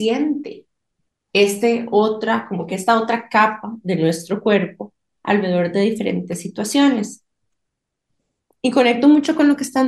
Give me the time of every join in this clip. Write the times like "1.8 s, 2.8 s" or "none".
none